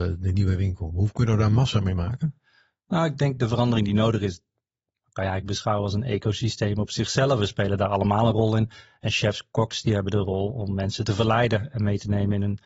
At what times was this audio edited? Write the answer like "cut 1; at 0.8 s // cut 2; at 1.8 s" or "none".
none